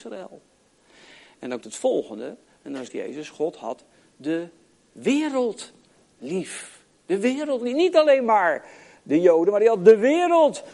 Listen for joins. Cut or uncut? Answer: cut